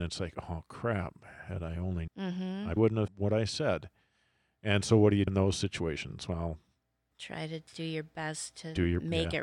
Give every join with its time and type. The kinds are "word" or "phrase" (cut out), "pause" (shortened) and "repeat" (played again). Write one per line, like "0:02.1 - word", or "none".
0:02.1 - word
0:02.8 - word
0:03.1 - word
0:05.3 - word